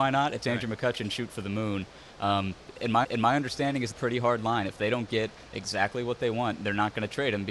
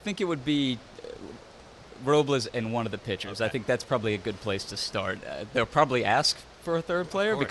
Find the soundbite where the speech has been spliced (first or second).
first